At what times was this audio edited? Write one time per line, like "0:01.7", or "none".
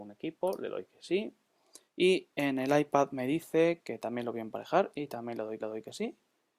0:01.8
0:05.6